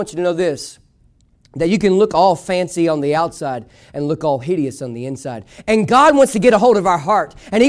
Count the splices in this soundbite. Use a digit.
0